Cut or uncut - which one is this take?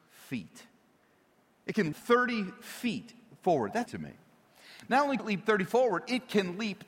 cut